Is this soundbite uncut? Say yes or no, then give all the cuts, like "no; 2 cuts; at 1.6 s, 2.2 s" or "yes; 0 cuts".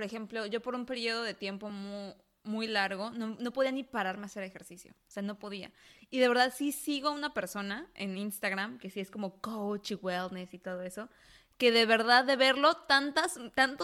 yes; 0 cuts